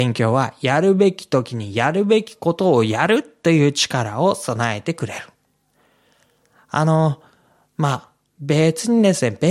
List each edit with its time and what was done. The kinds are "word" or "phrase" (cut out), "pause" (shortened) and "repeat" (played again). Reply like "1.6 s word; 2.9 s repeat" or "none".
none